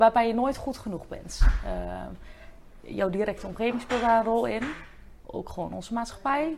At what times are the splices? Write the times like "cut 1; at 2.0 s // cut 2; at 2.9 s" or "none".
none